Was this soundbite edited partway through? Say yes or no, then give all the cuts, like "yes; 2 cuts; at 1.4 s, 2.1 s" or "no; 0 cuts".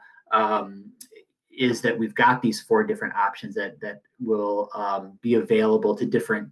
no; 0 cuts